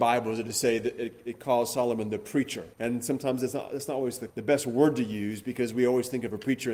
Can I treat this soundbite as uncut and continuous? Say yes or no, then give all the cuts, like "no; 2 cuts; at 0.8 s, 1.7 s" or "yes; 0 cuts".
no; 2 cuts; at 2.7 s, 4.3 s